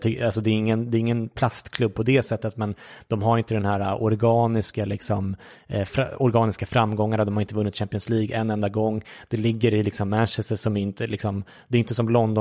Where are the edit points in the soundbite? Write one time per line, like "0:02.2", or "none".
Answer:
none